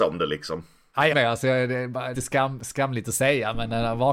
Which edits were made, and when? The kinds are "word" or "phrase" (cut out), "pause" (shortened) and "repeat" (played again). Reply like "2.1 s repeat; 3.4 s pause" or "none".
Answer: 1.1 s word; 2.1 s word